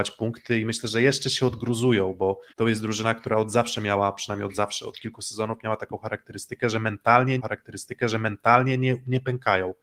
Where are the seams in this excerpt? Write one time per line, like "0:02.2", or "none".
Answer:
0:02.5
0:07.4